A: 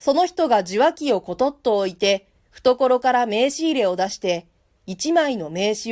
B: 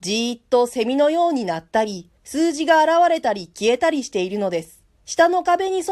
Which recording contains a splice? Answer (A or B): B